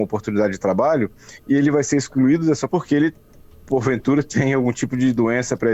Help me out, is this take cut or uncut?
cut